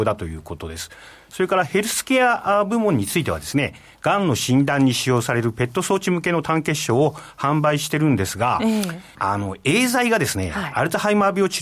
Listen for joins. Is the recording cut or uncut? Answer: cut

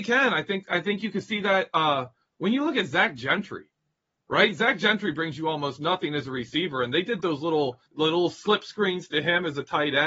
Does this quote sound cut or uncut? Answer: cut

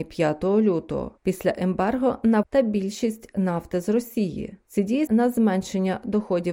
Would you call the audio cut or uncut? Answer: cut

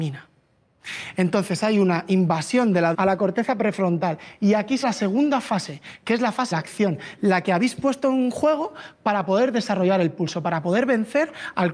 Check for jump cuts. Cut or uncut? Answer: cut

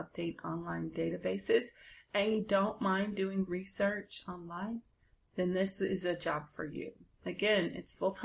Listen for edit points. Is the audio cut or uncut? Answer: uncut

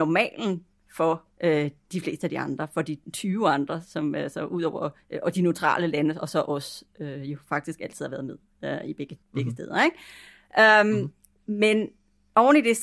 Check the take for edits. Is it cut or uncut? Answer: cut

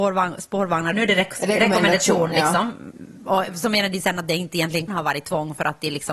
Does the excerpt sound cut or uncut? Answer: cut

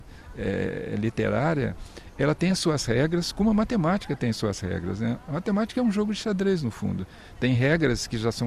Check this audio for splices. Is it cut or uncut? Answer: uncut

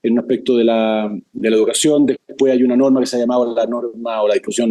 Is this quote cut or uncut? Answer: uncut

